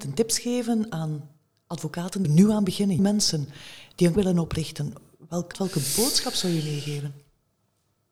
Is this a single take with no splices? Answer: no; 4 cuts; at 2.2 s, 3.0 s, 4.2 s, 5.5 s

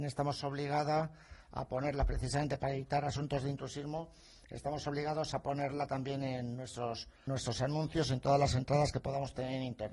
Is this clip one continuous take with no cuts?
no; 1 cut; at 7.3 s

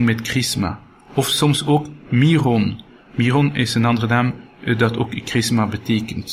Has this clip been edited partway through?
no; 0 cuts

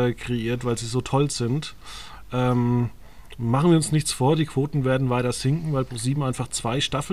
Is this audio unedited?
yes; 0 cuts

